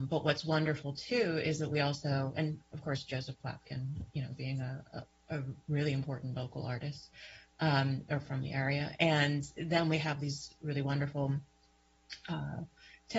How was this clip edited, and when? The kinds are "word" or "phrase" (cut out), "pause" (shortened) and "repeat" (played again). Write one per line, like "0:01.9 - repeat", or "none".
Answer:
none